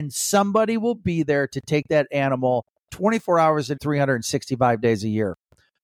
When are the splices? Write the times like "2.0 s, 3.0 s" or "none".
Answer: 3.8 s